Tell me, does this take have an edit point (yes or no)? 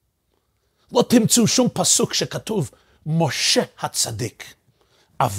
no